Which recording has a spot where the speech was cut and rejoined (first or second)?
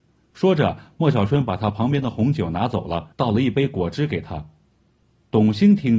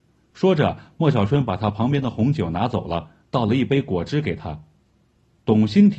first